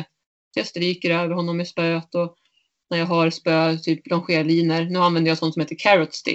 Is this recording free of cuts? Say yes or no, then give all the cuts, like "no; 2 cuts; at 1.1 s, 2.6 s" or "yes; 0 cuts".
yes; 0 cuts